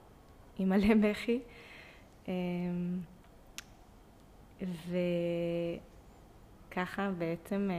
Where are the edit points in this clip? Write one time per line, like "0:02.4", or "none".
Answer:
0:04.5